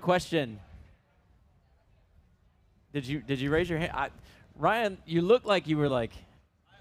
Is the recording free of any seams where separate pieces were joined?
yes; 0 cuts

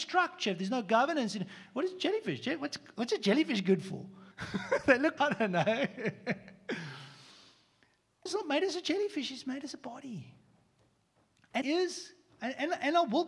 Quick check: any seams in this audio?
yes; 4 cuts; at 4.3 s, 5.2 s, 8.3 s, 11.6 s

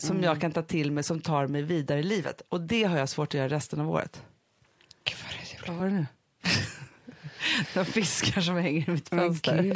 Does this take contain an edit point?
no; 0 cuts

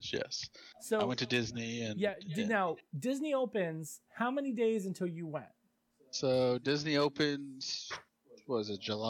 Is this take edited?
no; 0 cuts

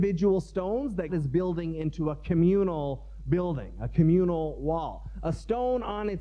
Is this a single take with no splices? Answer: no; 1 cut; at 1.1 s

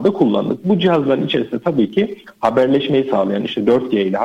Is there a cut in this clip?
no; 0 cuts

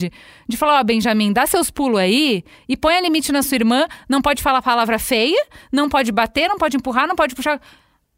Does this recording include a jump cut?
no; 0 cuts

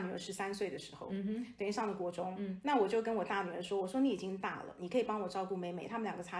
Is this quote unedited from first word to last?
yes; 0 cuts

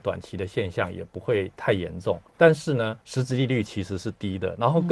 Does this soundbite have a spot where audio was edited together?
yes; 2 cuts; at 2.3 s, 3.0 s

